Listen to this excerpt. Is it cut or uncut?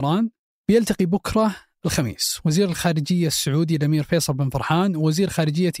uncut